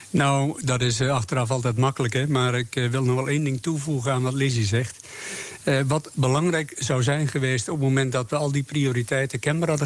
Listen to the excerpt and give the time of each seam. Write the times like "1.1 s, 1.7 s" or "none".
none